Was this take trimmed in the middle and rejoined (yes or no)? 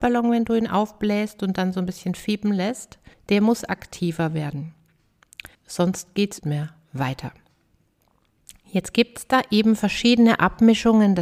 yes